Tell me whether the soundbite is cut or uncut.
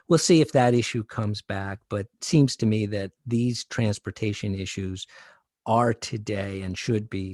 cut